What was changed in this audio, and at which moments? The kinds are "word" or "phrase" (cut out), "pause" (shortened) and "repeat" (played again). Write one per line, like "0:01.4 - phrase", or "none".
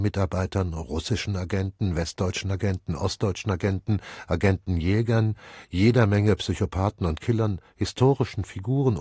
none